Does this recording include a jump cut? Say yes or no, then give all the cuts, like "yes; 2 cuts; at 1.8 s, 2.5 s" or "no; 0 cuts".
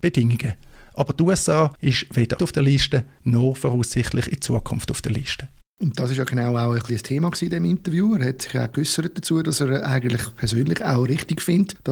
yes; 2 cuts; at 2.4 s, 5.6 s